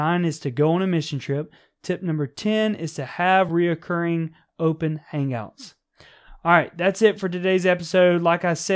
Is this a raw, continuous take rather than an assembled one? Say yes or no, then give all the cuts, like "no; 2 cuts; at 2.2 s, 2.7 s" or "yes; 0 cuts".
yes; 0 cuts